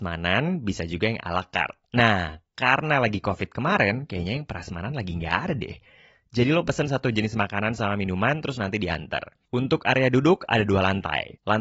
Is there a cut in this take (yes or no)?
no